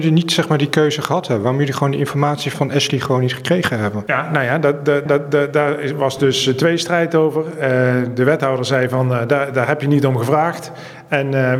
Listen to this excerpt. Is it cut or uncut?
cut